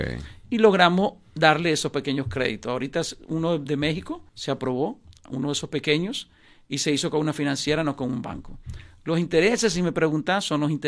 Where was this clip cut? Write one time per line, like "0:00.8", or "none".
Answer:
0:04.3